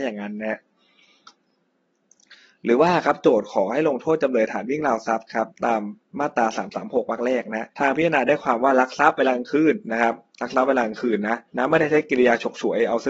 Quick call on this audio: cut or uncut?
cut